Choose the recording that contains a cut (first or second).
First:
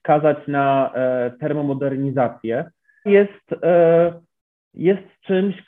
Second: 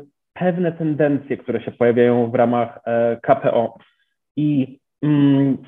first